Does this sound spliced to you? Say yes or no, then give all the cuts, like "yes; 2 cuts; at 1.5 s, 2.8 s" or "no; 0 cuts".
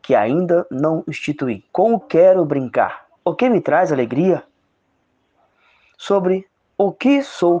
yes; 3 cuts; at 1.7 s, 2.0 s, 3.2 s